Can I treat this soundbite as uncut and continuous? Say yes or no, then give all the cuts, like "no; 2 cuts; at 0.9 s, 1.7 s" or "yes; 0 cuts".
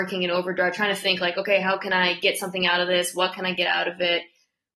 yes; 0 cuts